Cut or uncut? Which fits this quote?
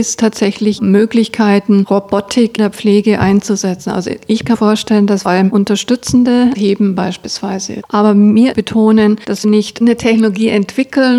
cut